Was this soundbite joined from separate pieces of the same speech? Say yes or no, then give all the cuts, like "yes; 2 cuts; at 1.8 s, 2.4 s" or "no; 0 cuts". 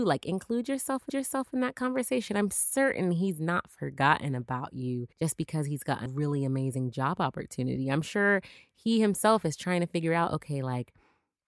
yes; 3 cuts; at 1.1 s, 5.1 s, 6.1 s